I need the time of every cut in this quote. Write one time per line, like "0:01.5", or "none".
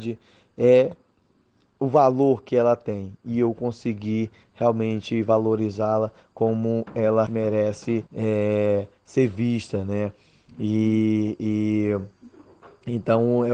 0:07.3
0:08.1